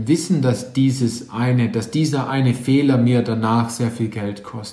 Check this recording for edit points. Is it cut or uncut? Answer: uncut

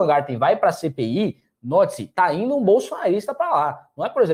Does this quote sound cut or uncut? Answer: uncut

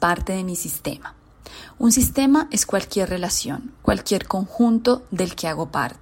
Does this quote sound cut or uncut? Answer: uncut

